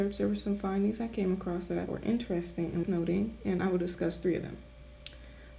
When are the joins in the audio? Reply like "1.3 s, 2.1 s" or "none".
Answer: 1.9 s, 2.8 s